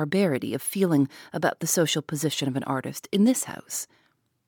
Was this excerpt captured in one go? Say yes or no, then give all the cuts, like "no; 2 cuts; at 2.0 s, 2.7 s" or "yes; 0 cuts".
yes; 0 cuts